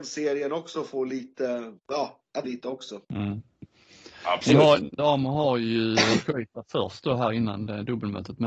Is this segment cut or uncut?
cut